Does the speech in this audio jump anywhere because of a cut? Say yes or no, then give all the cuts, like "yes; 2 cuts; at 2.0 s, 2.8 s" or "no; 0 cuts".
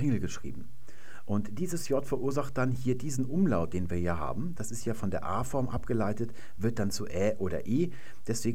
no; 0 cuts